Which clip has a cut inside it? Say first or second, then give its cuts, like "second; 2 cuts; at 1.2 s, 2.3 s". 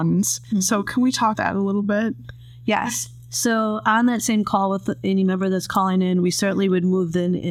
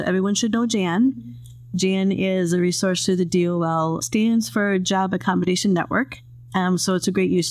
first; 1 cut; at 1.3 s